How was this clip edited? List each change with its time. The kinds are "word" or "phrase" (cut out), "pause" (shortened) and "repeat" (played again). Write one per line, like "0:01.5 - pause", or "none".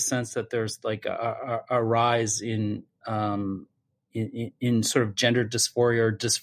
none

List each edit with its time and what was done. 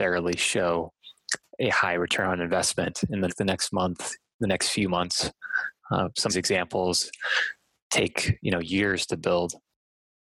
0:03.3 - phrase
0:06.3 - phrase

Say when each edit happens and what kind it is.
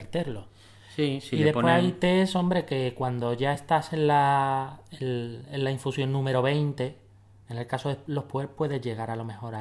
none

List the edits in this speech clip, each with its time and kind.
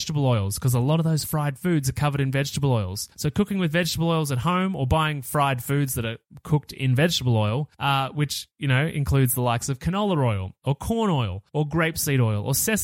0:03.1 - pause
0:07.7 - pause
0:11.5 - pause

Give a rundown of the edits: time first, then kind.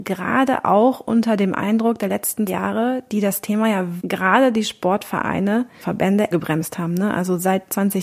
0:02.5 - word
0:04.0 - word
0:05.8 - word
0:06.3 - word

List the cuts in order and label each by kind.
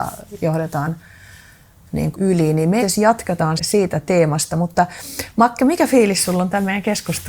0:02.1 - phrase
0:02.8 - word
0:03.6 - word

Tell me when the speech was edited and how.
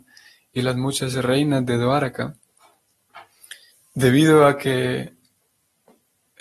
0:03.7 - pause

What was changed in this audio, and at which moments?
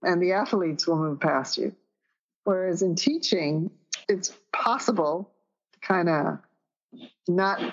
0:04.0 - word

